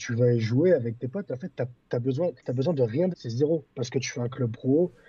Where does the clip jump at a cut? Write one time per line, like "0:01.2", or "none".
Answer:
0:02.4
0:03.1